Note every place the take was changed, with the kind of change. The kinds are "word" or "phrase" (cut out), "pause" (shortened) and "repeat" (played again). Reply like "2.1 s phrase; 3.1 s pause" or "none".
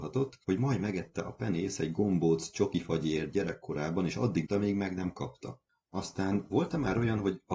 4.5 s word